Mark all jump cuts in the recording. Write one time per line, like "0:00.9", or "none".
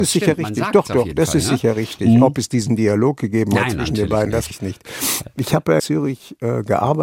0:04.5
0:05.8